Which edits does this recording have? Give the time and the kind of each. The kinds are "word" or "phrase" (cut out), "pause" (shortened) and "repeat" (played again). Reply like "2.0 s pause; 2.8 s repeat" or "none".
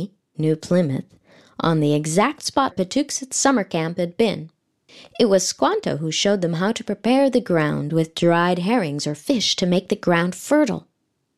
2.7 s word